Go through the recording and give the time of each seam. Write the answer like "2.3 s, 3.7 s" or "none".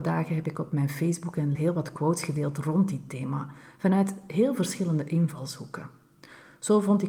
1.5 s